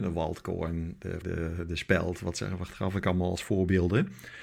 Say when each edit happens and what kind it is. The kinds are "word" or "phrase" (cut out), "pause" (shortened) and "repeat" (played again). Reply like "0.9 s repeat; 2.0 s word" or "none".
1.2 s word